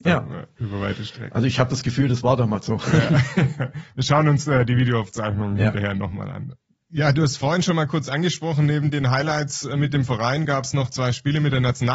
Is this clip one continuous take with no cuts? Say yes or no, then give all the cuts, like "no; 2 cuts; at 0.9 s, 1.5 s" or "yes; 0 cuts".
yes; 0 cuts